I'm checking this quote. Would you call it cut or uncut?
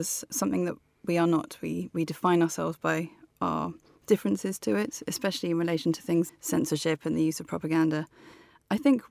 cut